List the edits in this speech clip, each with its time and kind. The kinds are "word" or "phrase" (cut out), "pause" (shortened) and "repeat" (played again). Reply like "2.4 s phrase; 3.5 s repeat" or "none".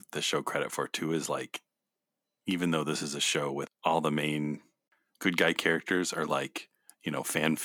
3.7 s word